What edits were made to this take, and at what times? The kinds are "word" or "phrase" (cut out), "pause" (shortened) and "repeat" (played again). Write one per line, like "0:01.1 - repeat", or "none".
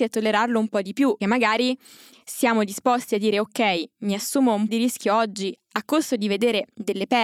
0:01.2 - word
0:04.7 - word